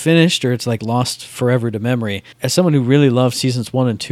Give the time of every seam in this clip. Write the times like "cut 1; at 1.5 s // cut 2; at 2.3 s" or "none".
cut 1; at 2.3 s